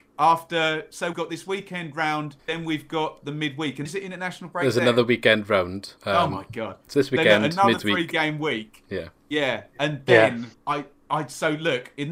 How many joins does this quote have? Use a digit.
6